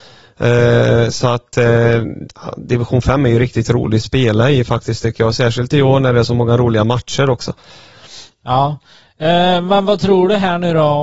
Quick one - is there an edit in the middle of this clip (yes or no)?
no